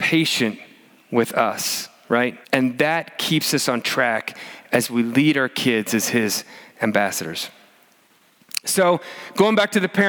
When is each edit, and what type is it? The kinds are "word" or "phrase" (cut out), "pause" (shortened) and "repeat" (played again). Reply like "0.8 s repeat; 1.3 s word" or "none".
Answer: 2.4 s pause